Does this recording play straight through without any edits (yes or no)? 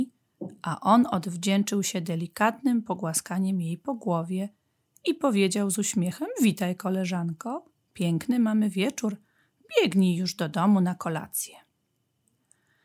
yes